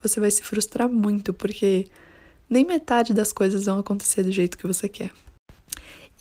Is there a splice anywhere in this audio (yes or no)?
no